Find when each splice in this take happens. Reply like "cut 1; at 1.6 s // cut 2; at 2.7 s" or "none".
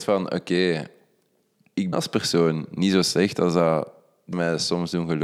cut 1; at 1.9 s // cut 2; at 4.3 s